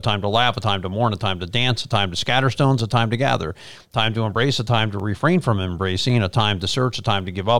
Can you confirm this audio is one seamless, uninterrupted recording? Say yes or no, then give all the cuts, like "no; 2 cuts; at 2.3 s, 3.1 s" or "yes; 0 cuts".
yes; 0 cuts